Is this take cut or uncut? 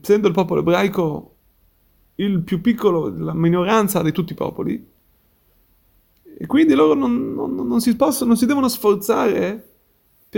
uncut